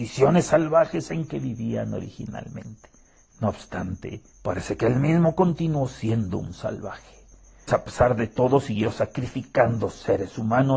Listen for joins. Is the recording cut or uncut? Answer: cut